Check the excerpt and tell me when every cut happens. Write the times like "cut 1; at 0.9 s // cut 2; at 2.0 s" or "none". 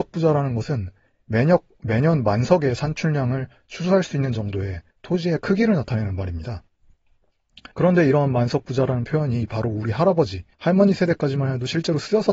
cut 1; at 4.9 s // cut 2; at 7.7 s // cut 3; at 10.5 s